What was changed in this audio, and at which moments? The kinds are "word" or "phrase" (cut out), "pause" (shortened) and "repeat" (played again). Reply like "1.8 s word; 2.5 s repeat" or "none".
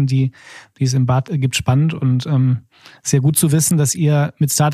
none